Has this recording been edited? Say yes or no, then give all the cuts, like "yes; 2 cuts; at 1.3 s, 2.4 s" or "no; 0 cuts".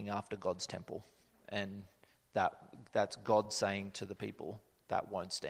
no; 0 cuts